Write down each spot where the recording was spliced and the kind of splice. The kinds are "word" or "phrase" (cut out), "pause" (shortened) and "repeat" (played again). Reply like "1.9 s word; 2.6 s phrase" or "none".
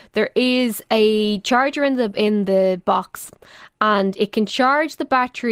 none